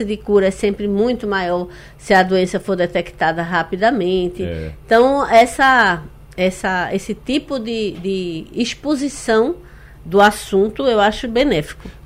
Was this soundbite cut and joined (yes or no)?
no